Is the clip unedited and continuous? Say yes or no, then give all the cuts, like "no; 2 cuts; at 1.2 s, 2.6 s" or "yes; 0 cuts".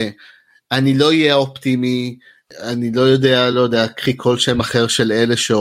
yes; 0 cuts